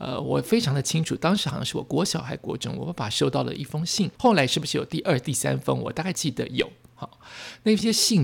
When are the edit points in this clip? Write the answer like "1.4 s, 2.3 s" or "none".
4.1 s